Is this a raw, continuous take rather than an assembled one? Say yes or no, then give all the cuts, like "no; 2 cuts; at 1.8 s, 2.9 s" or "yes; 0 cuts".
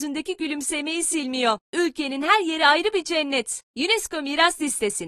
no; 2 cuts; at 1.6 s, 3.7 s